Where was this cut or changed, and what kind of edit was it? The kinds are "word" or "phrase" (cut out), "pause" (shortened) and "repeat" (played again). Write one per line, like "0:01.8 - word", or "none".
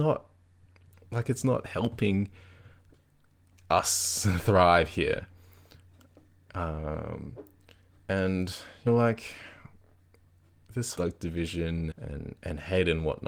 0:08.9 - word
0:11.0 - word
0:11.9 - word